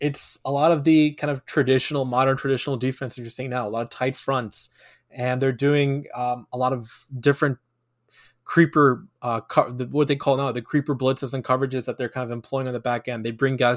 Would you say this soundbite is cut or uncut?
uncut